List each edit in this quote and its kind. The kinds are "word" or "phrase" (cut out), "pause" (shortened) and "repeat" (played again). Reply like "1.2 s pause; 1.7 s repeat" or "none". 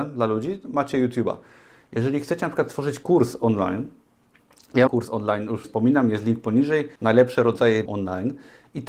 4.9 s word; 5.6 s phrase; 7.0 s pause; 7.9 s word